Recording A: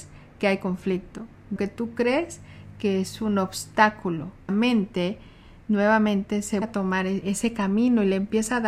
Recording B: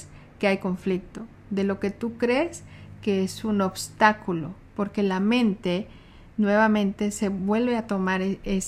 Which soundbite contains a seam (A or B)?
A